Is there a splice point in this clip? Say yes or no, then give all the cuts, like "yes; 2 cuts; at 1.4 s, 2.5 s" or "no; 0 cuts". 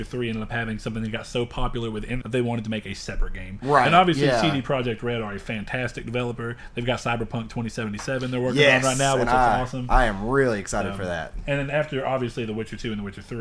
yes; 1 cut; at 2.2 s